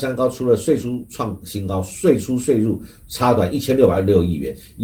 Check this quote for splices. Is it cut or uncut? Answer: uncut